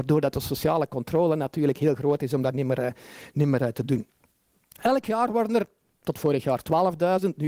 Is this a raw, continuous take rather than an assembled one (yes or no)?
yes